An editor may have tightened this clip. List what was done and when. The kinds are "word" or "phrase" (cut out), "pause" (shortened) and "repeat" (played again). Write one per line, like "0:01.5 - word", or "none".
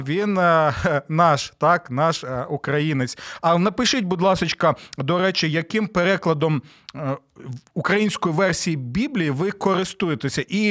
none

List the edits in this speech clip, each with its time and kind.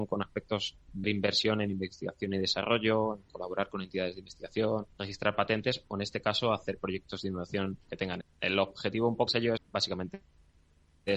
0:01.0 - word
0:04.9 - pause
0:07.8 - word
0:08.2 - word
0:09.3 - word
0:09.6 - word

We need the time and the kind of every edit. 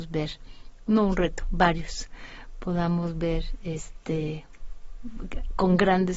none

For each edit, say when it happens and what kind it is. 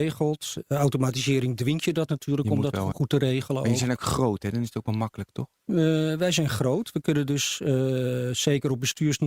0:02.1 - word
0:02.9 - word
0:05.5 - pause

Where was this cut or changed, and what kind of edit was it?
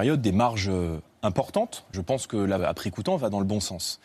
0:01.9 - word
0:02.6 - word

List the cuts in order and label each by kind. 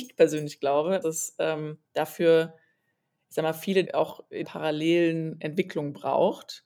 0:01.0 - word
0:01.8 - pause
0:03.8 - word
0:04.4 - word

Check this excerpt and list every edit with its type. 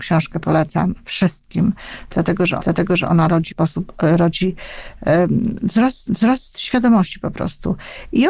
0:02.6 - repeat
0:03.5 - phrase
0:06.1 - repeat

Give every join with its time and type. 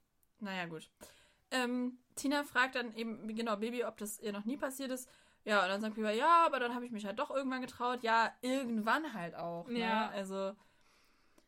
none

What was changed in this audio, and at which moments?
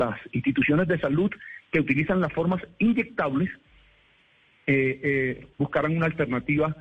0:05.5 - pause

